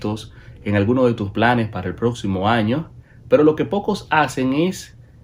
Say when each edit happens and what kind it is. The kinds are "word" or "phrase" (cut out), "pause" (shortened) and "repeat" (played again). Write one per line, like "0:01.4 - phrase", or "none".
none